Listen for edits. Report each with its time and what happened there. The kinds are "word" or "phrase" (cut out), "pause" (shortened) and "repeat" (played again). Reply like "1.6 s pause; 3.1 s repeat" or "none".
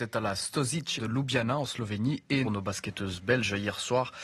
1.0 s word; 2.4 s phrase